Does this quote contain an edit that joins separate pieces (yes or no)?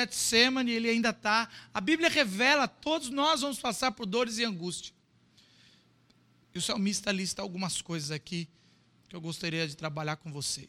no